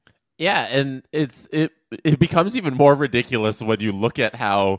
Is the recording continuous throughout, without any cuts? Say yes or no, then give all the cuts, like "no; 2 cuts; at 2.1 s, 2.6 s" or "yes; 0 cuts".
yes; 0 cuts